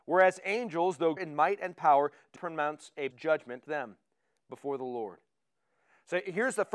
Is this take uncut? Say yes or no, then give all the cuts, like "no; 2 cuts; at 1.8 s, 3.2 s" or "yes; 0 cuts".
no; 4 cuts; at 1.2 s, 2.4 s, 3.1 s, 3.7 s